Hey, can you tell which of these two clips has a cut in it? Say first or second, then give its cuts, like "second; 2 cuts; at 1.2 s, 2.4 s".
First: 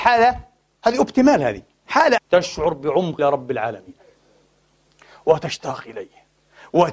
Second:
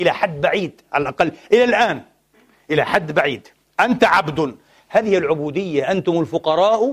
first; 2 cuts; at 2.2 s, 3.2 s